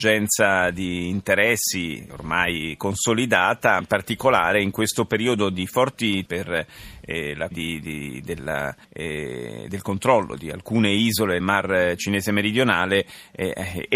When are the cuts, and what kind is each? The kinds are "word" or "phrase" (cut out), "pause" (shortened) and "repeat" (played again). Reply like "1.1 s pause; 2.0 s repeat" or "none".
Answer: 2.1 s word; 3.8 s word; 6.3 s phrase; 7.5 s word; 8.8 s pause; 11.4 s word